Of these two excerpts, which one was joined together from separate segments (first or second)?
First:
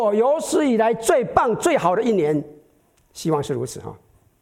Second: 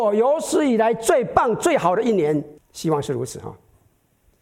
second